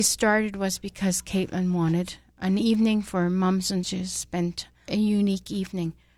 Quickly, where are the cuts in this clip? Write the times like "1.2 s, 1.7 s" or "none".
3.8 s, 4.9 s